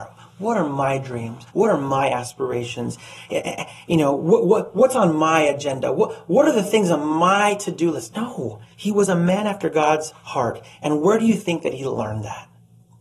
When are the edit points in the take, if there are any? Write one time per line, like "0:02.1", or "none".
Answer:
0:01.5
0:08.7